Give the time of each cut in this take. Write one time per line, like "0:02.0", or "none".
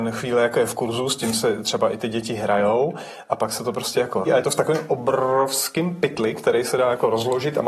0:04.3